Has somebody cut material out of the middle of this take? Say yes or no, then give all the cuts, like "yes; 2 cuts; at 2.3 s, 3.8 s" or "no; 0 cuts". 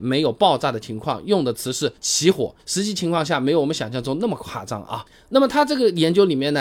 yes; 2 cuts; at 1.9 s, 2.6 s